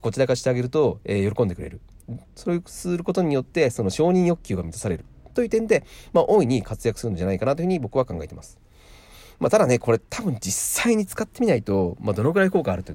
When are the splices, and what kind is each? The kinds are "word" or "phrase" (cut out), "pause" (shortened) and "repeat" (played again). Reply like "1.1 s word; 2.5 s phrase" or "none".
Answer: none